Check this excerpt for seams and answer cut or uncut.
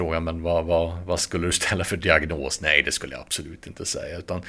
uncut